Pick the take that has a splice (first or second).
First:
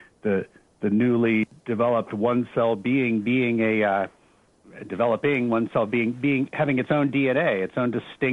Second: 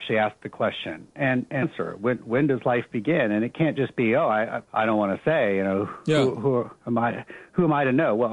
second